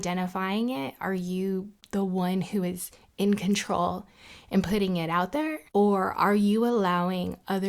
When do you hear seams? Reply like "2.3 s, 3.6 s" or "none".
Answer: 5.7 s